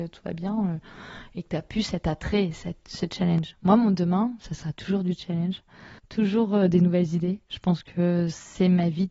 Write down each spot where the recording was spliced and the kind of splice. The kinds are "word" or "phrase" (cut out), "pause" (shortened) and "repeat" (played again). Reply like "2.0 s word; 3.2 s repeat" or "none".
6.0 s pause